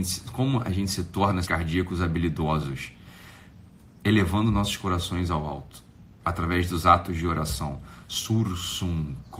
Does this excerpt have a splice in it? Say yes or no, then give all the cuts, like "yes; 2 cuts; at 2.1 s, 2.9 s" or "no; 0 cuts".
yes; 1 cut; at 1.4 s